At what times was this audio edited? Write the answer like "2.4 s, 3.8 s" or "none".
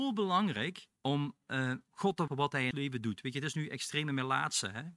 1.0 s, 1.9 s, 2.3 s, 2.7 s